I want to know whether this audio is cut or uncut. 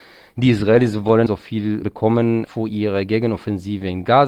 cut